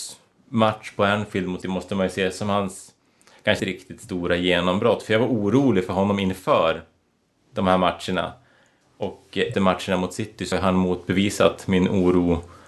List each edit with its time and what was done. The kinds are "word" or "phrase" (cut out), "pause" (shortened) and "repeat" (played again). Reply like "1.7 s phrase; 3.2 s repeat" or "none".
1.6 s word; 3.6 s word; 9.5 s word; 10.5 s word